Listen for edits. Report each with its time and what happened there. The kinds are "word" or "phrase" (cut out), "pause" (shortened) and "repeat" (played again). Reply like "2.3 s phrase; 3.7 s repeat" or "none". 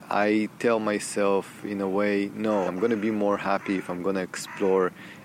2.7 s word